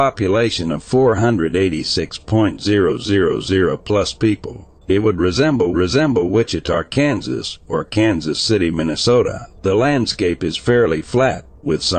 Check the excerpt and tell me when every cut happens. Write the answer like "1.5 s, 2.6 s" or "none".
4.8 s, 5.7 s, 9.6 s